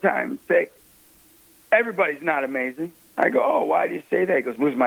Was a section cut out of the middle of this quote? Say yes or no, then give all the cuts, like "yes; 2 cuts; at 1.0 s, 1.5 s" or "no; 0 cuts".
no; 0 cuts